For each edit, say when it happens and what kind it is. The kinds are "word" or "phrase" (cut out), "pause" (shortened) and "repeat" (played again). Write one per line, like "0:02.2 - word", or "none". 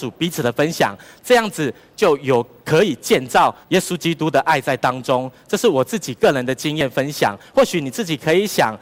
0:03.6 - pause